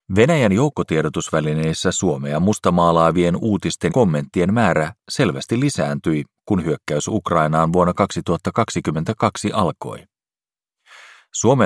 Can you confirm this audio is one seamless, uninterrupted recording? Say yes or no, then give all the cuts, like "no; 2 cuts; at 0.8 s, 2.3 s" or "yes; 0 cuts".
no; 1 cut; at 3.9 s